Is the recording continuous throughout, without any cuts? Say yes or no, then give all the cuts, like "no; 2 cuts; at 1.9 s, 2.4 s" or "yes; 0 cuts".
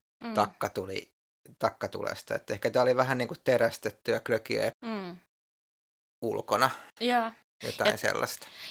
no; 1 cut; at 4.7 s